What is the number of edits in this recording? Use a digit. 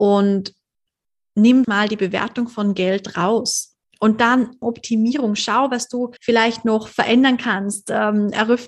4